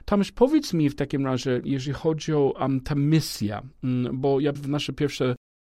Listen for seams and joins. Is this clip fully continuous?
no; 1 cut; at 4.6 s

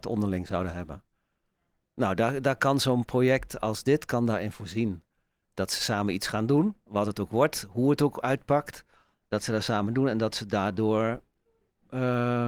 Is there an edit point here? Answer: no; 0 cuts

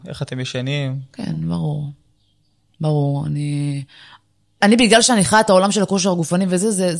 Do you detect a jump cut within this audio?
no; 0 cuts

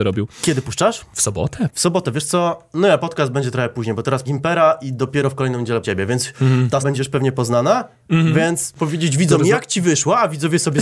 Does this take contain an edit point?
yes; 4 cuts; at 4.2 s, 5.8 s, 6.8 s, 8.7 s

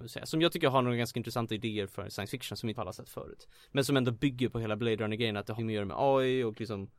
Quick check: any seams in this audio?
yes; 2 cuts; at 2.7 s, 5.6 s

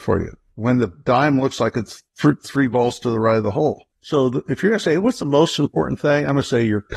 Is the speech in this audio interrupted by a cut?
yes; 1 cut; at 2.1 s

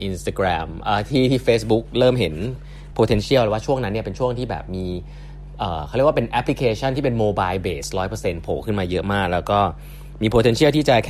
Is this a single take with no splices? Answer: yes; 0 cuts

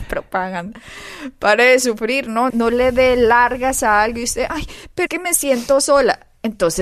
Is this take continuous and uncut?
no; 2 cuts; at 2.5 s, 5.1 s

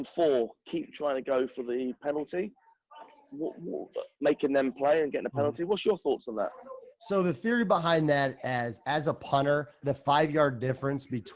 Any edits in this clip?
yes; 1 cut; at 9.8 s

